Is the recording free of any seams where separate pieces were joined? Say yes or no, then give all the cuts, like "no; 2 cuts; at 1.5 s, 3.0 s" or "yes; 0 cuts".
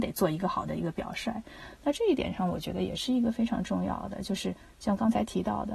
yes; 0 cuts